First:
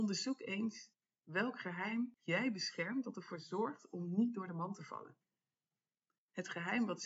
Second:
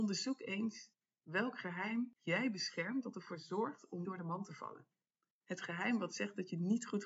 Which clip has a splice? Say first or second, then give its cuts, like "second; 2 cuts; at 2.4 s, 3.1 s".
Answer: second; 2 cuts; at 4.0 s, 5.0 s